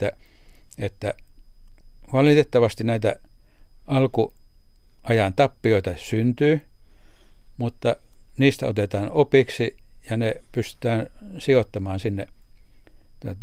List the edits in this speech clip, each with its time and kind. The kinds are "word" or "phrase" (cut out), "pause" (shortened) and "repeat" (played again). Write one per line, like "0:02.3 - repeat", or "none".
none

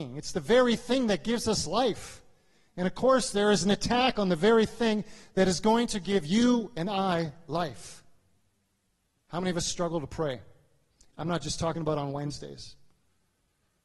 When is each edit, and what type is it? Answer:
none

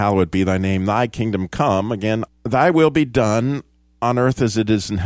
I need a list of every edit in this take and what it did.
0:02.3 - phrase

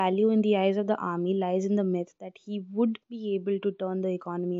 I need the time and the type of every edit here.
0:03.0 - pause

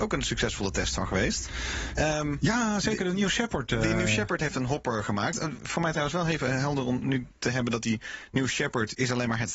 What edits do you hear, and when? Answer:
none

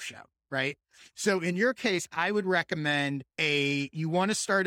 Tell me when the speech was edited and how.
0:03.3 - pause

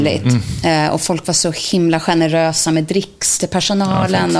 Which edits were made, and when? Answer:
none

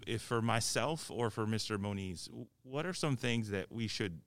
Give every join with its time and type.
none

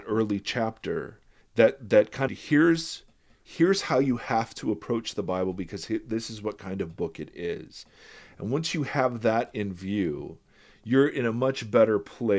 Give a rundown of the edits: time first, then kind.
0:01.4 - pause
0:02.3 - phrase

